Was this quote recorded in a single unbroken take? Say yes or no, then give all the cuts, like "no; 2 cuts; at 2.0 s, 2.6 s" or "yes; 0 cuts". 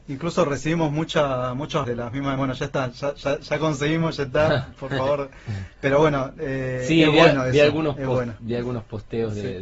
no; 2 cuts; at 1.8 s, 2.4 s